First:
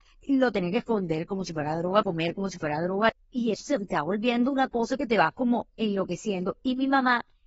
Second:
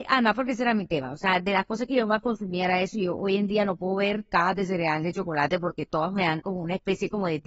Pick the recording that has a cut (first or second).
first